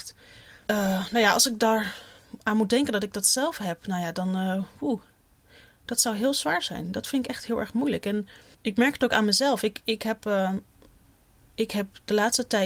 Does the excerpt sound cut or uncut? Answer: uncut